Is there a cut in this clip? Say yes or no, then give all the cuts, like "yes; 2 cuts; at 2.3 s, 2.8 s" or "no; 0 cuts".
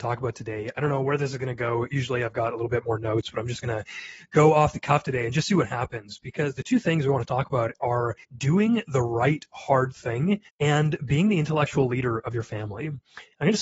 yes; 2 cuts; at 8.2 s, 10.5 s